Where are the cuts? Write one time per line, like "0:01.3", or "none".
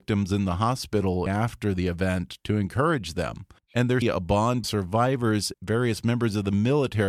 0:01.3
0:03.6
0:04.0
0:04.6
0:05.5